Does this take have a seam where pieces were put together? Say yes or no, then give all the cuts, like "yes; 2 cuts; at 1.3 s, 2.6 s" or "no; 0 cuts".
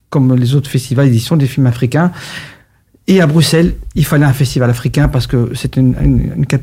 no; 0 cuts